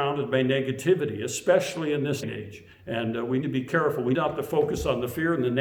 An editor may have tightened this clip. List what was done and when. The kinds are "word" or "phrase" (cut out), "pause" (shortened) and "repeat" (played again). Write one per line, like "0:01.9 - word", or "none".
0:02.2 - word
0:02.7 - pause
0:03.4 - word
0:04.1 - word